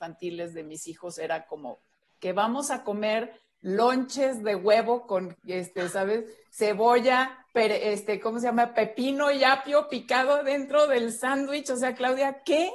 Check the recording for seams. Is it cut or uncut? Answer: uncut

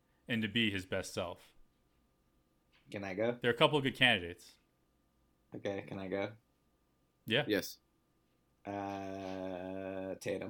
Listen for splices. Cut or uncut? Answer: uncut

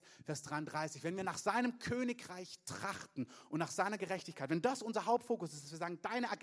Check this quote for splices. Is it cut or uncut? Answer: uncut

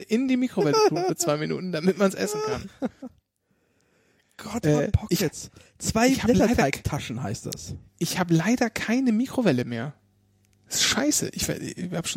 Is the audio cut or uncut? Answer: cut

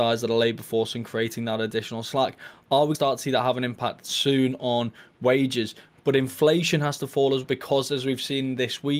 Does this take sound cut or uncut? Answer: cut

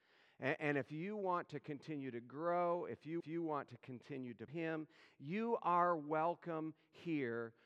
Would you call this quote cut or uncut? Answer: cut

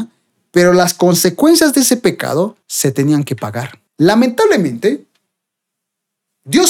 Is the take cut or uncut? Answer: cut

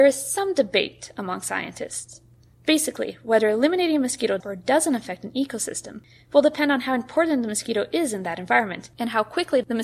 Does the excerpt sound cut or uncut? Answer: cut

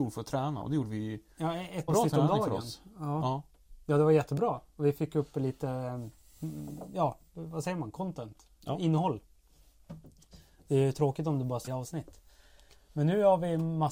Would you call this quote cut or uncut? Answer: cut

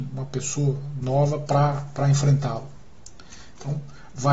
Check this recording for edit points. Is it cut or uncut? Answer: uncut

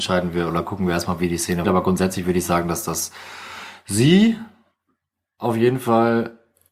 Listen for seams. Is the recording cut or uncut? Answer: cut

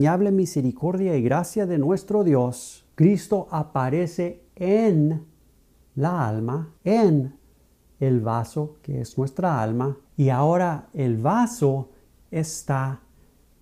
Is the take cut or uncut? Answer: cut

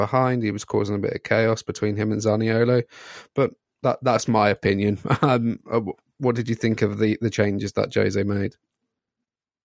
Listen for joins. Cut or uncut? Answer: uncut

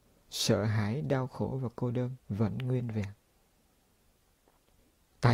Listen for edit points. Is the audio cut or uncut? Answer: cut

